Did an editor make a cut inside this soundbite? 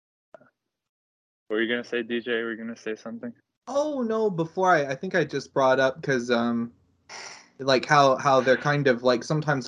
yes; 1 cut; at 3.4 s

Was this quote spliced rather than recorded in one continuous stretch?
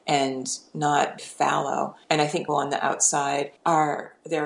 yes; 4 cuts; at 1.2 s, 2.0 s, 2.5 s, 3.6 s

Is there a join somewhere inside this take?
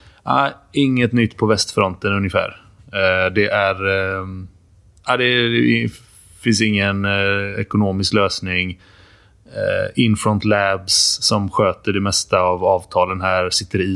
no; 0 cuts

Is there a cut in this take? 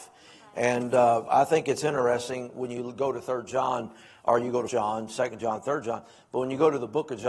yes; 2 cuts; at 1.3 s, 4.7 s

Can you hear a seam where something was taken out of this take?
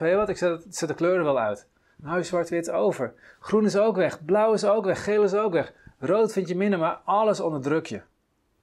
no; 0 cuts

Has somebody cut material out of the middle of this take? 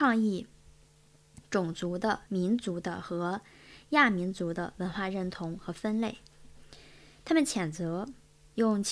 yes; 1 cut; at 2.3 s

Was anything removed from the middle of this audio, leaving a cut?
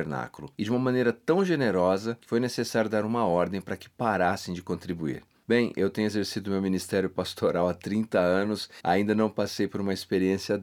no; 0 cuts

